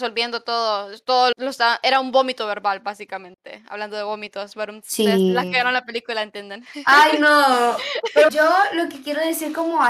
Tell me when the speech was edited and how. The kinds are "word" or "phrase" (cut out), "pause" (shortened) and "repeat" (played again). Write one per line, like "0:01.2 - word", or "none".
0:01.3 - word
0:08.3 - word